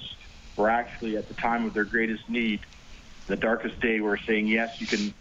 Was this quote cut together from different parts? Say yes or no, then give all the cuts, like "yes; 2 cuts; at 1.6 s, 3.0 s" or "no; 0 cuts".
no; 0 cuts